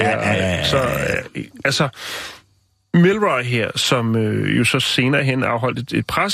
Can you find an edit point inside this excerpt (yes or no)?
no